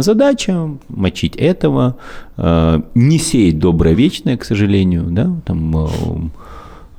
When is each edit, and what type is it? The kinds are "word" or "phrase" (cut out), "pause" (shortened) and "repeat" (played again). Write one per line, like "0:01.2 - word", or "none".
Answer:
none